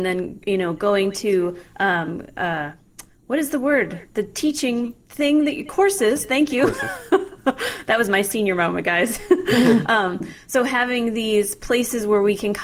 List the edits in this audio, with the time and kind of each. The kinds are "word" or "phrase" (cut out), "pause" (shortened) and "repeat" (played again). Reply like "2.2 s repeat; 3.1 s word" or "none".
none